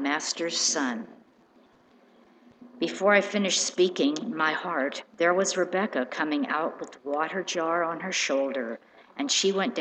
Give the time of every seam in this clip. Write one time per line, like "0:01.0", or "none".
0:05.1